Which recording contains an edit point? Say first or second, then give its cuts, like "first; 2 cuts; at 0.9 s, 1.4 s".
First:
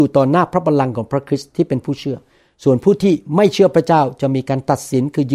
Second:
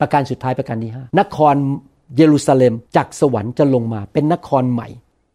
second; 2 cuts; at 1.1 s, 2.9 s